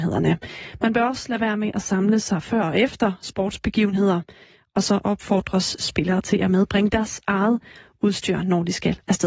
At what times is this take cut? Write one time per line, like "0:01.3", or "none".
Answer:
none